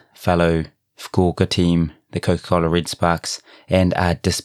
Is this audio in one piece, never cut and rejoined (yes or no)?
yes